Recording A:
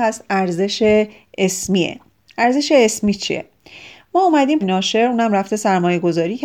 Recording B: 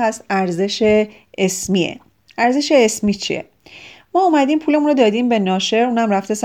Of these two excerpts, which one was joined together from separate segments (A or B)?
A